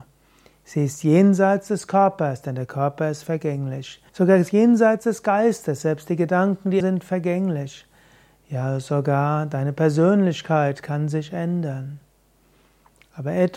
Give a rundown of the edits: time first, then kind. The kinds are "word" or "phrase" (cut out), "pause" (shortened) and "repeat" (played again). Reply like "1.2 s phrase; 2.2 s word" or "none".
4.1 s pause; 6.8 s word